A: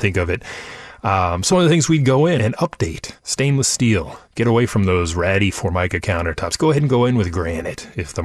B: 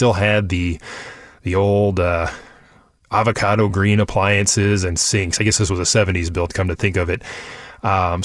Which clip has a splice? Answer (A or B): A